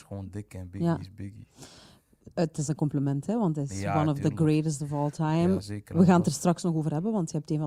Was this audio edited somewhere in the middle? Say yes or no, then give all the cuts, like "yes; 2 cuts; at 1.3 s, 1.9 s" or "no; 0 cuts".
yes; 1 cut; at 2.7 s